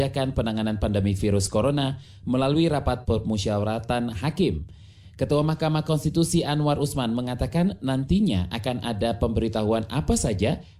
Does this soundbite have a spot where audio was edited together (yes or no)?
no